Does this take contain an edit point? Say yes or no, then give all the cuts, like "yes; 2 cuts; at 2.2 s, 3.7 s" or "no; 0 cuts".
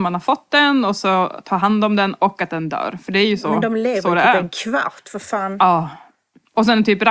no; 0 cuts